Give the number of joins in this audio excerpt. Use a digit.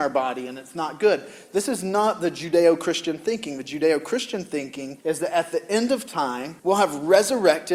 2